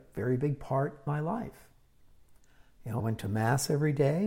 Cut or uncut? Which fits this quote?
cut